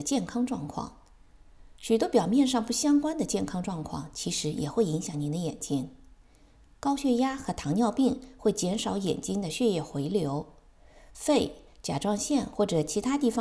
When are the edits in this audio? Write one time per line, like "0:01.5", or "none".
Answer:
none